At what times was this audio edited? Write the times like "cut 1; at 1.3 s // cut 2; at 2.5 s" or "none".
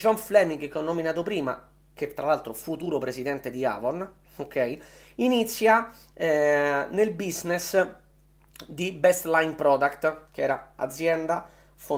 none